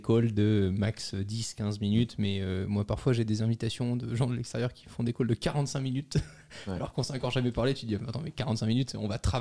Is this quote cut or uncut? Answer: uncut